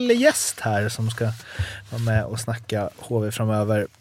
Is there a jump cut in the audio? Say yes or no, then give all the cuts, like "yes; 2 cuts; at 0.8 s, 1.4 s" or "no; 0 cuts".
no; 0 cuts